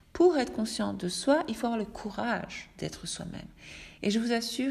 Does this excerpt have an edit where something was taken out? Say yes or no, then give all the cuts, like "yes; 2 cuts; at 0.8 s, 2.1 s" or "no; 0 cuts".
no; 0 cuts